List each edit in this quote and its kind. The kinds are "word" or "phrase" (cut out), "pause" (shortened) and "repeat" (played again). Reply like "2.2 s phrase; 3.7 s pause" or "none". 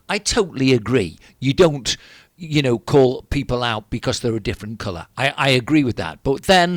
none